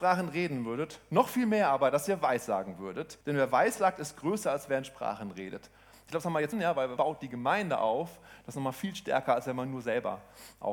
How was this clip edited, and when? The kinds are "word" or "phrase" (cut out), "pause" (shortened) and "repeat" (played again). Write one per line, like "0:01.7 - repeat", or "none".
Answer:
0:03.2 - pause
0:06.5 - word
0:07.0 - word